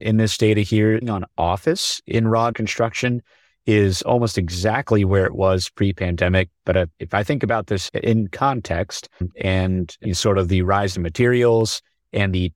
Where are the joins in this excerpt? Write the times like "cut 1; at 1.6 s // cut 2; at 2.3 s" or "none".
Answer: cut 1; at 1.0 s // cut 2; at 2.5 s // cut 3; at 6.9 s // cut 4; at 9.3 s // cut 5; at 10.9 s